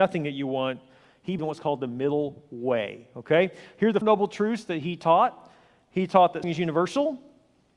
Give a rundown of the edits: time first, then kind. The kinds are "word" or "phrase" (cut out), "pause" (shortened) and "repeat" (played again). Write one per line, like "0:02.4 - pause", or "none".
0:01.4 - word
0:04.0 - word
0:06.4 - word